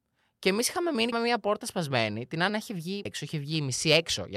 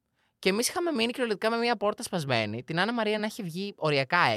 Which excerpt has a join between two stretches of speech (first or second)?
first